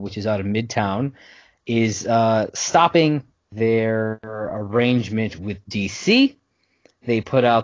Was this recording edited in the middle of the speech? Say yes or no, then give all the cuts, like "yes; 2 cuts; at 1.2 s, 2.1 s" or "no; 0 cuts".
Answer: no; 0 cuts